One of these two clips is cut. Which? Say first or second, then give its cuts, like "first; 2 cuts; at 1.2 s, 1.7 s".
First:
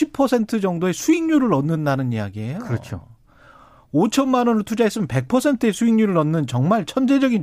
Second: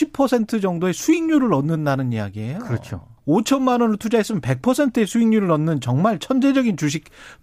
second; 1 cut; at 3.2 s